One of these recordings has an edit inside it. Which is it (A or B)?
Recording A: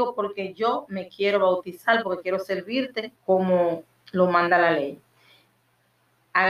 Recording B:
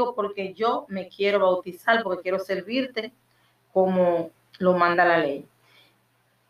A